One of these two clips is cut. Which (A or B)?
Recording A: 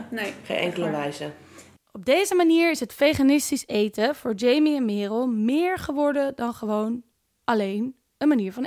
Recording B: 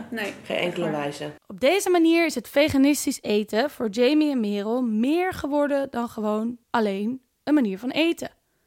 B